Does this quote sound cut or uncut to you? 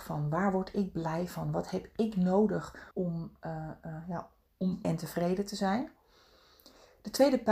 cut